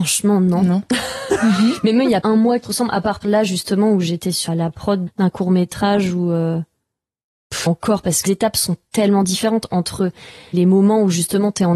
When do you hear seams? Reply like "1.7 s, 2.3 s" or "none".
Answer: 2.2 s, 2.6 s, 3.2 s, 4.5 s, 5.1 s, 7.7 s, 8.3 s, 10.5 s